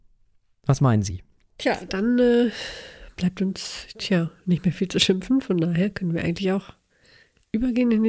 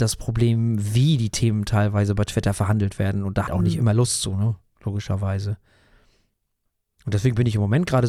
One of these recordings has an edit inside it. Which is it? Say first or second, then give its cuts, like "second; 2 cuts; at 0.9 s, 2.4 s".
second; 1 cut; at 3.5 s